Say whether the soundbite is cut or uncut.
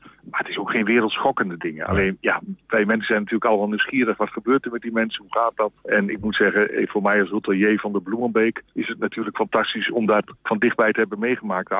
cut